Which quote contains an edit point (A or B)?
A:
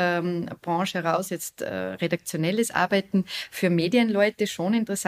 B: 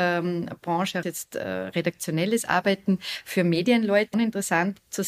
B